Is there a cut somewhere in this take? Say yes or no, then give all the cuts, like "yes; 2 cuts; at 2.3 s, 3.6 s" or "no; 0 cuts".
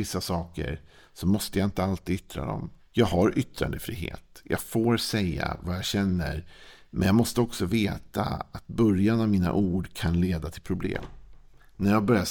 yes; 1 cut; at 2.8 s